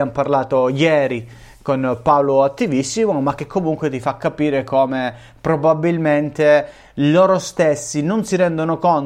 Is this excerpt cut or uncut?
uncut